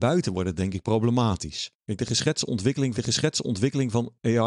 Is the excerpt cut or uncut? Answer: cut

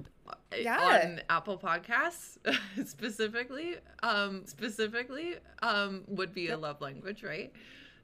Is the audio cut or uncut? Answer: cut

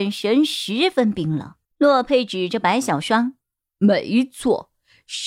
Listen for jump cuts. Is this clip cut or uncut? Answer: cut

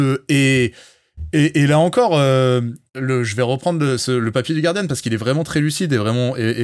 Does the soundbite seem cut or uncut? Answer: cut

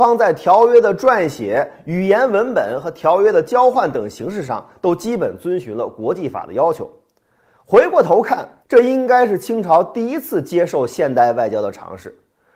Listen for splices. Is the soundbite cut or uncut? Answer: cut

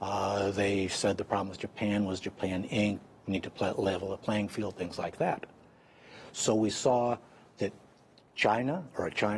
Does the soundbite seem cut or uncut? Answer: uncut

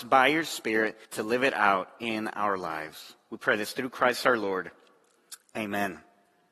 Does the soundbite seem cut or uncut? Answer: cut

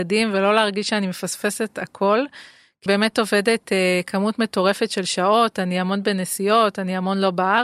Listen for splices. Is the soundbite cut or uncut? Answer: cut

